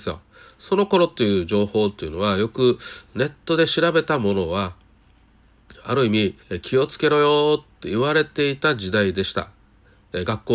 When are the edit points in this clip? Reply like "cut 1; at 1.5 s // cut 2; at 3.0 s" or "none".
cut 1; at 6.4 s